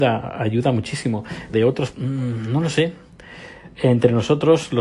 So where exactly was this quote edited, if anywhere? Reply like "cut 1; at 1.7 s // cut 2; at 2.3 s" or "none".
cut 1; at 1.5 s // cut 2; at 1.9 s